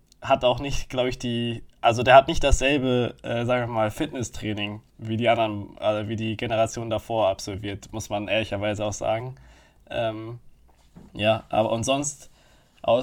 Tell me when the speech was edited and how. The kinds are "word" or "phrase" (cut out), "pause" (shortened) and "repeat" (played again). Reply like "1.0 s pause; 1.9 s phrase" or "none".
4.9 s pause; 11.1 s pause